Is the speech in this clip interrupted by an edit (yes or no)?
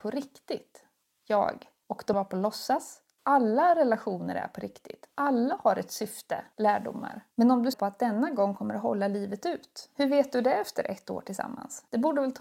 yes